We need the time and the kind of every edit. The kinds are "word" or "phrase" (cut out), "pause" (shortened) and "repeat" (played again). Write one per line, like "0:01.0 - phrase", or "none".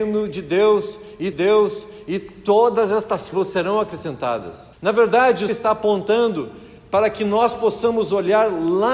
0:01.3 - repeat
0:03.3 - word
0:04.7 - pause
0:05.5 - word